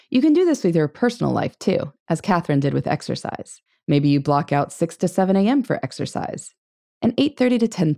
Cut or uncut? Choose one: cut